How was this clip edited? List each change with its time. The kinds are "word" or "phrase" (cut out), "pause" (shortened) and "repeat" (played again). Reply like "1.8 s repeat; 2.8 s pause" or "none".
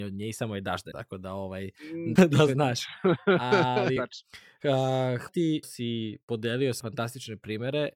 0.9 s word; 2.2 s word; 4.0 s word; 5.3 s word; 5.6 s word; 6.8 s word